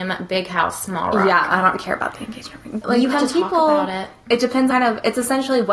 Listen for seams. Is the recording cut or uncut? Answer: cut